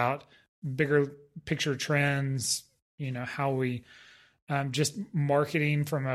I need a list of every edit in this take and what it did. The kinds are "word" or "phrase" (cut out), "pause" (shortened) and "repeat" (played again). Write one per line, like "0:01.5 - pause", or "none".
none